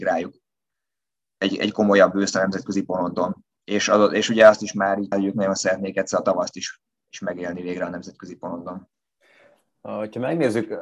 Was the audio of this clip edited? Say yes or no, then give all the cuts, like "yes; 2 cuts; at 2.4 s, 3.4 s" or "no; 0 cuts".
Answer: yes; 1 cut; at 5.1 s